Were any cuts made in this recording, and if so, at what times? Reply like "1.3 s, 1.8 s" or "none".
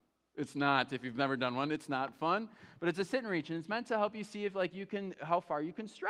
none

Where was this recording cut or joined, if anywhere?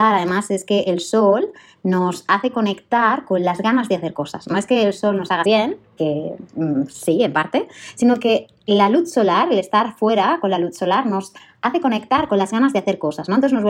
5.4 s

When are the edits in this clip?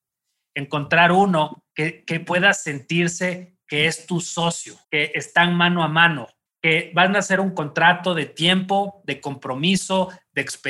1.7 s, 4.8 s, 6.5 s

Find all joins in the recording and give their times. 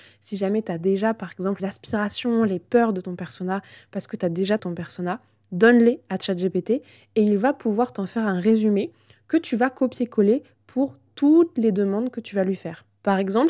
1.6 s, 4.6 s

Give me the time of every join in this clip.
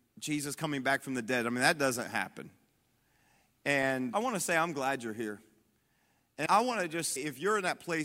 4.1 s, 6.5 s, 7.2 s

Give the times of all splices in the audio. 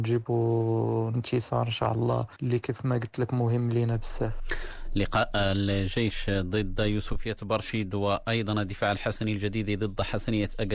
none

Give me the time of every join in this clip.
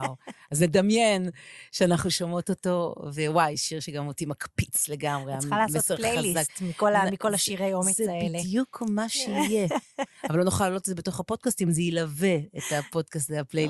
none

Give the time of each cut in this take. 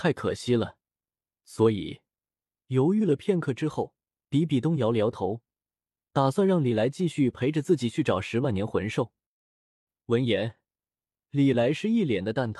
none

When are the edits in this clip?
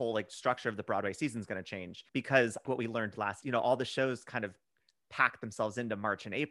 2.1 s, 2.7 s, 3.4 s

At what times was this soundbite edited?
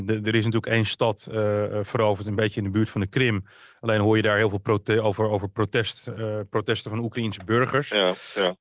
none

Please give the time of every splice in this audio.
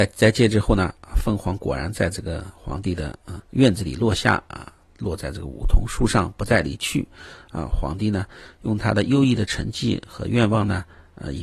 3.4 s

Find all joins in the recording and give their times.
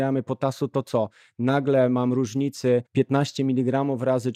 2.9 s

